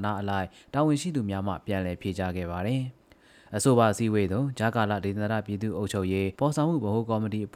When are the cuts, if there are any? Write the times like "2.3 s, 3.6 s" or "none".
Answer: 3.0 s, 6.3 s